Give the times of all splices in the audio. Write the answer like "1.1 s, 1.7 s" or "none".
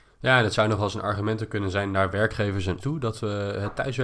2.8 s